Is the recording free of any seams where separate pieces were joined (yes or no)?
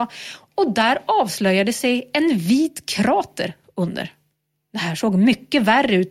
yes